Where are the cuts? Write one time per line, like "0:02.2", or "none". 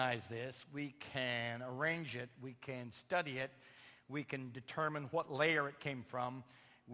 none